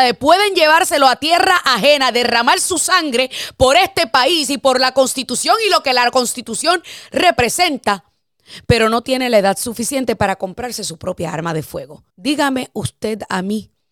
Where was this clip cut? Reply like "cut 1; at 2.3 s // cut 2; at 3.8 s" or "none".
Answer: cut 1; at 12.1 s